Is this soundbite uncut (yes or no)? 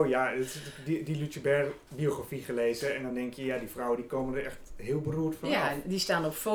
yes